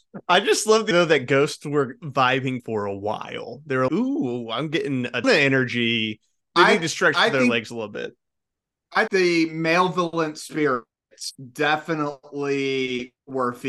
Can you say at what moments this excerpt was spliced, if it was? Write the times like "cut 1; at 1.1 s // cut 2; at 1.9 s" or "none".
cut 1; at 0.9 s // cut 2; at 2.6 s // cut 3; at 3.9 s // cut 4; at 5.2 s // cut 5; at 6.4 s // cut 6; at 9.1 s